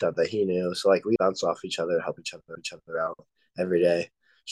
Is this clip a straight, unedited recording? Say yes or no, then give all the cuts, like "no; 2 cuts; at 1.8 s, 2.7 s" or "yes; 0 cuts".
no; 2 cuts; at 1.2 s, 2.5 s